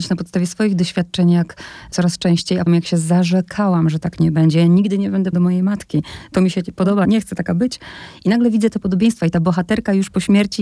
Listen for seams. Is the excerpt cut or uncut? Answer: cut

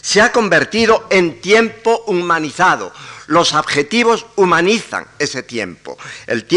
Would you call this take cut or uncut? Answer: uncut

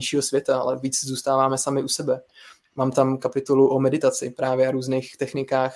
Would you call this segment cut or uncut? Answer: uncut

